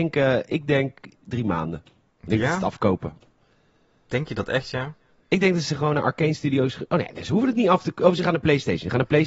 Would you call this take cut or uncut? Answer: uncut